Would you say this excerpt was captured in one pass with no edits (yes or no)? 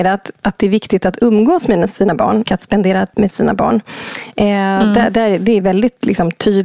no